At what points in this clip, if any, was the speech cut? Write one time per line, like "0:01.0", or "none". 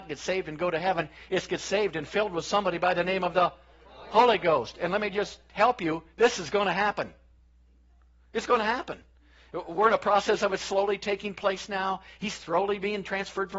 none